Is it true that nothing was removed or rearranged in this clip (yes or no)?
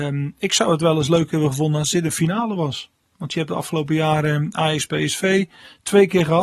yes